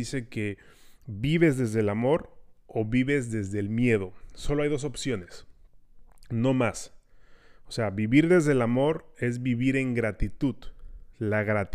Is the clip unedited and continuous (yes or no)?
yes